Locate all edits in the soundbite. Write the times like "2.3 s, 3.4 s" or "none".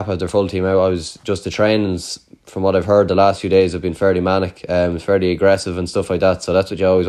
none

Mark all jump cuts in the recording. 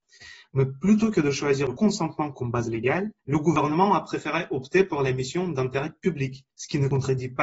3.2 s, 6.5 s

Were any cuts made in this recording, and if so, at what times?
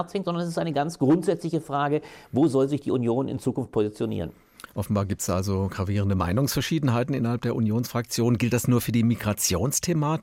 none

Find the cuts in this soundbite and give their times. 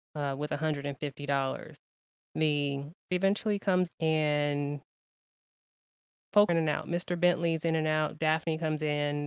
3.1 s, 3.9 s, 6.5 s

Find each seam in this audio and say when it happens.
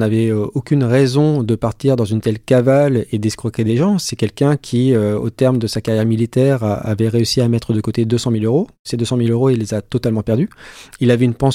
none

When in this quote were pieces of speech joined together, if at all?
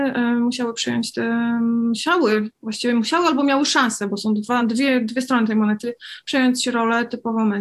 none

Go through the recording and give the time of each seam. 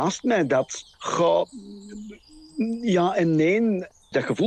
0.9 s

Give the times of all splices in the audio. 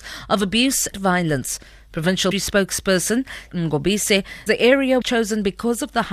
0.9 s, 2.3 s, 3.5 s, 4.5 s, 5.0 s

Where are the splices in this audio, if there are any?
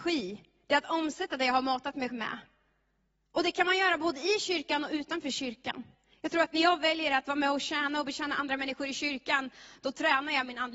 2.1 s

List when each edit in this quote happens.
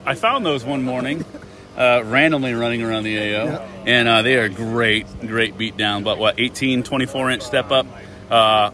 none

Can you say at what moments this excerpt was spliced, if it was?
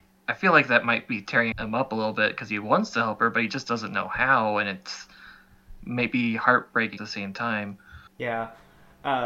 1.5 s, 7.0 s, 8.1 s

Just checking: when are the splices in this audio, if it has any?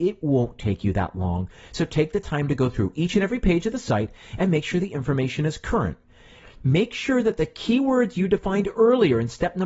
none

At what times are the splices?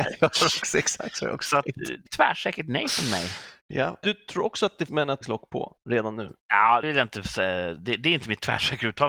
2.1 s, 4.0 s, 4.9 s, 5.2 s, 6.8 s

